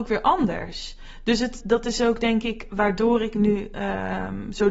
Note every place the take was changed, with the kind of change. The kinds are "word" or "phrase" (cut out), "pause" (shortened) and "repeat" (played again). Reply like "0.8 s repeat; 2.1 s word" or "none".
1.6 s word